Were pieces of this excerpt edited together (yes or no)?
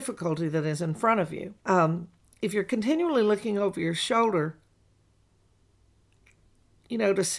yes